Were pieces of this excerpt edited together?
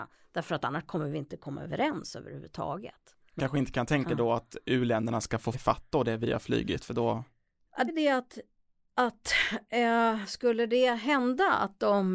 yes; 3 cuts; at 3.4 s, 5.5 s, 7.9 s

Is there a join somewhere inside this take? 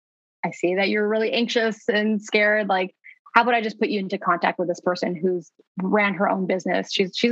no; 0 cuts

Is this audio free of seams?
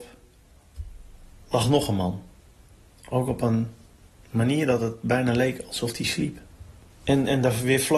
yes; 0 cuts

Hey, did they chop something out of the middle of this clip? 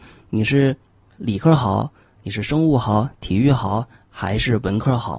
no; 0 cuts

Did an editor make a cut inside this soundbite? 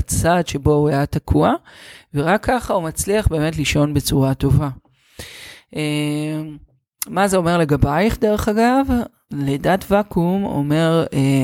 no; 0 cuts

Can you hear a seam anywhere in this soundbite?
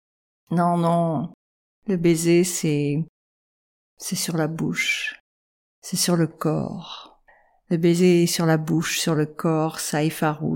no; 0 cuts

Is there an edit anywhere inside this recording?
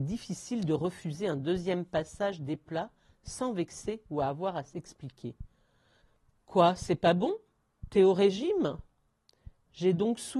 no; 0 cuts

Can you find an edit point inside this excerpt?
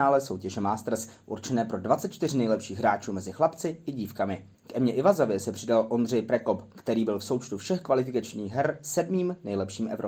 yes; 1 cut; at 4.5 s

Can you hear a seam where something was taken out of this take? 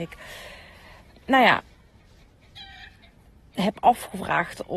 no; 0 cuts

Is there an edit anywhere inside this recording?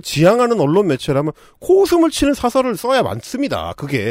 no; 0 cuts

